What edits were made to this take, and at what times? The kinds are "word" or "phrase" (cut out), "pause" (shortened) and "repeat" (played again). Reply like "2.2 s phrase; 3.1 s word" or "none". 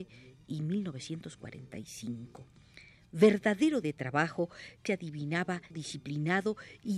3.8 s word; 4.9 s word; 5.7 s word